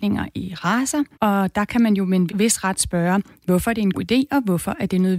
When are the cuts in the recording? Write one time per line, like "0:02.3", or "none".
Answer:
0:01.1
0:02.3
0:03.9